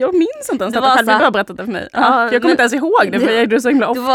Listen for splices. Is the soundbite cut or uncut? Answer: cut